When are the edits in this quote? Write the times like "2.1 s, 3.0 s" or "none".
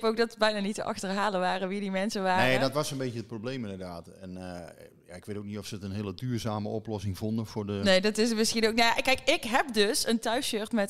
none